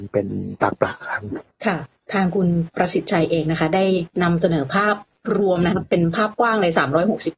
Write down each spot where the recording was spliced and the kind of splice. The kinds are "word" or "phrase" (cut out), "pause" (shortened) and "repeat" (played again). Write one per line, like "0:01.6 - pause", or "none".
0:04.1 - pause

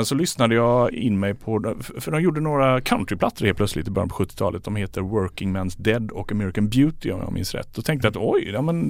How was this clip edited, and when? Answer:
0:00.9 - word

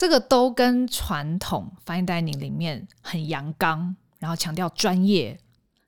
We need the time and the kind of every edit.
none

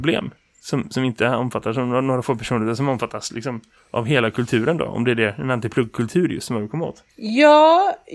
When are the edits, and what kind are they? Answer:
0:03.8 - pause
0:07.1 - pause

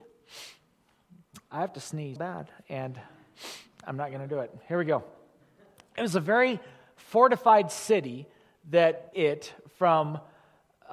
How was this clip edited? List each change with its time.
0:02.2 - word
0:09.1 - word

